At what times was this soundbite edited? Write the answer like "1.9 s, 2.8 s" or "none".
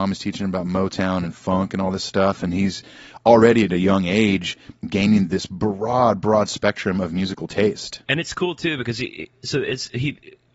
8.0 s